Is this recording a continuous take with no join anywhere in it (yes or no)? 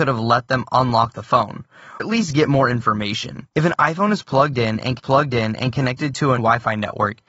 no